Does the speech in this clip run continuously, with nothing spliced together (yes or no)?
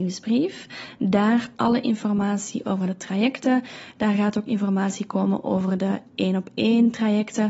no